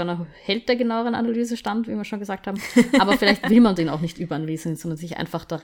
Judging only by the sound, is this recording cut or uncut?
uncut